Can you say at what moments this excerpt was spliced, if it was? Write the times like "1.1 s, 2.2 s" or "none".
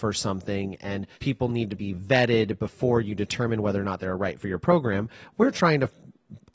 1.1 s, 4.4 s